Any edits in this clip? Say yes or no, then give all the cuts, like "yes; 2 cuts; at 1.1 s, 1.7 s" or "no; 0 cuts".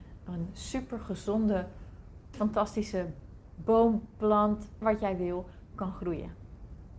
yes; 2 cuts; at 2.3 s, 4.8 s